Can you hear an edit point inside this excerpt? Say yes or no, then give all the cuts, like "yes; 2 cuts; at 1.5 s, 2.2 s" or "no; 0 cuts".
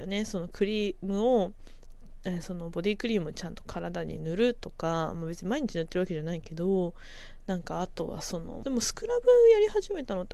yes; 1 cut; at 8.6 s